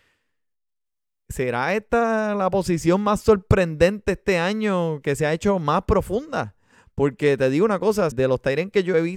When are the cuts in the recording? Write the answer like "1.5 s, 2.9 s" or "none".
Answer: 8.1 s